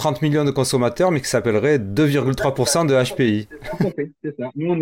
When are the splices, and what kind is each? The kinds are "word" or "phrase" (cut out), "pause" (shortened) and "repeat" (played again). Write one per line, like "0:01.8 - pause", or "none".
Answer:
none